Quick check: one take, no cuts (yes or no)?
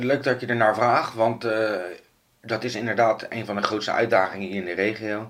yes